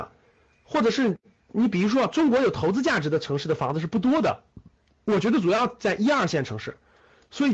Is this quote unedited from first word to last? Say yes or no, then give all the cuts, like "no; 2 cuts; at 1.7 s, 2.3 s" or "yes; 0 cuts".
yes; 0 cuts